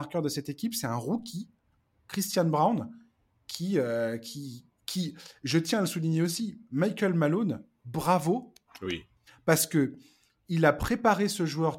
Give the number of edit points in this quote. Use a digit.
0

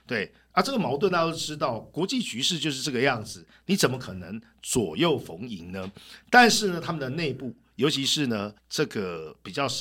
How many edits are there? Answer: 1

